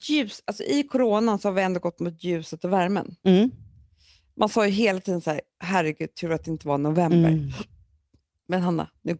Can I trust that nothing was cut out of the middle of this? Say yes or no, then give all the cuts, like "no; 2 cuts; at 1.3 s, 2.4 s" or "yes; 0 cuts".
yes; 0 cuts